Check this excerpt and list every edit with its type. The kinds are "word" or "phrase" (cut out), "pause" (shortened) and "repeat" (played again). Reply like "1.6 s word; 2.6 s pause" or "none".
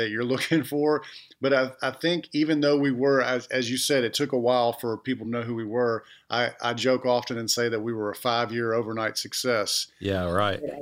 none